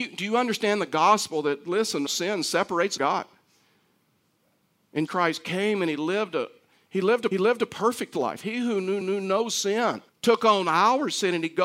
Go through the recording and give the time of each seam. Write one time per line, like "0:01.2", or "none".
0:02.1
0:03.0
0:05.1
0:07.3
0:09.0
0:10.1